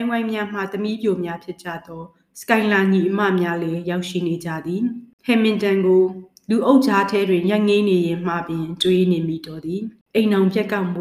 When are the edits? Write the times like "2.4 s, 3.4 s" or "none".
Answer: none

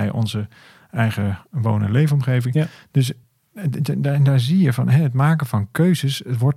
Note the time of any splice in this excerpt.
none

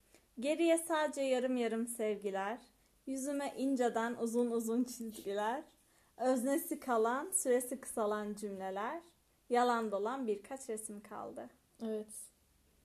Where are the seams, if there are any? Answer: none

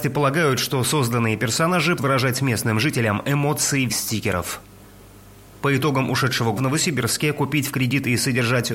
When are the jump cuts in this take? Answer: 2.0 s, 3.9 s, 6.6 s

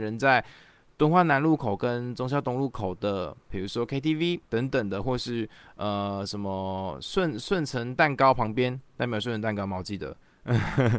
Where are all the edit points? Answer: 3.4 s, 4.5 s

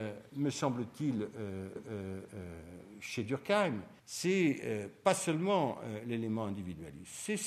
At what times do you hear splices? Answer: 1.8 s, 4.0 s

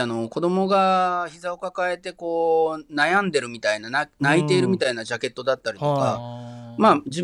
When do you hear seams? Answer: none

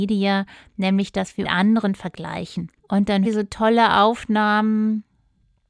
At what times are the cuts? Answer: 1.4 s, 2.8 s, 3.2 s

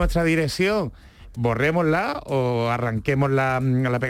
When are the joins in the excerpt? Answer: 1.3 s

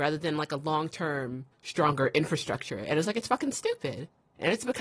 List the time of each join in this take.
1.5 s

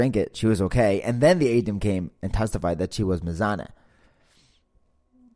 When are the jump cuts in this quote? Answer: none

